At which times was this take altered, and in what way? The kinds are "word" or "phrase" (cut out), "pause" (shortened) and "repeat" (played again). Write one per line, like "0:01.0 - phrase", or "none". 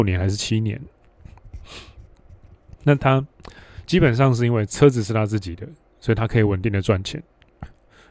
none